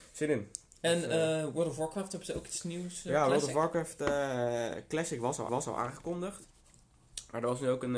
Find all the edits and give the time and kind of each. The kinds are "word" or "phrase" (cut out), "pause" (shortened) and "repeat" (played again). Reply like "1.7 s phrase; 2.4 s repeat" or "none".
5.5 s repeat